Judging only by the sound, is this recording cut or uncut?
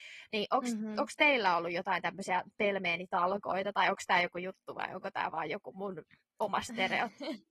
uncut